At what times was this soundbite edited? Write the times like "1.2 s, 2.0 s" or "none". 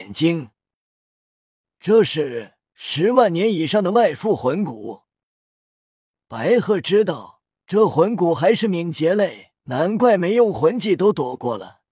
2.6 s, 7.6 s, 9.6 s